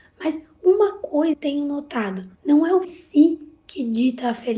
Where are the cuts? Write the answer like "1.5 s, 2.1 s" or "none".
1.3 s, 2.3 s, 2.8 s